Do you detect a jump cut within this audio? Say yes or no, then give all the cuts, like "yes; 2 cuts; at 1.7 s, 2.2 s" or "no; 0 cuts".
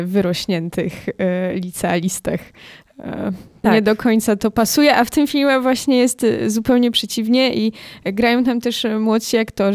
yes; 1 cut; at 3.6 s